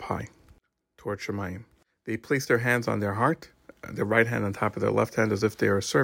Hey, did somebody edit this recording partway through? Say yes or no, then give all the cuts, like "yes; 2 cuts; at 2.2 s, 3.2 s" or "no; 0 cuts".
no; 0 cuts